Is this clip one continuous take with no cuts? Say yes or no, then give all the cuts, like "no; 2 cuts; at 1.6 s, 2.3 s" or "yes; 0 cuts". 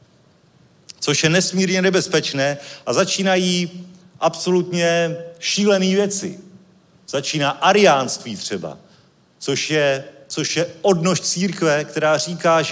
yes; 0 cuts